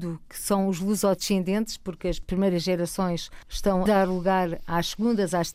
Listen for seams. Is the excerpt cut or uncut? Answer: cut